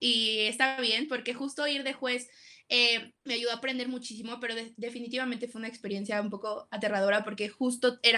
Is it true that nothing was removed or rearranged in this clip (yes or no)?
no